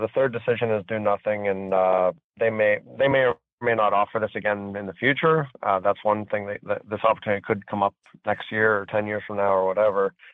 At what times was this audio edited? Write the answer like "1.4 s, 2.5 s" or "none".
none